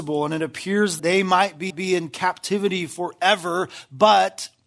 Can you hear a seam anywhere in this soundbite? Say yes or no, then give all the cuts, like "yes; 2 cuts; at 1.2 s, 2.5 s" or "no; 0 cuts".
yes; 2 cuts; at 1.0 s, 1.7 s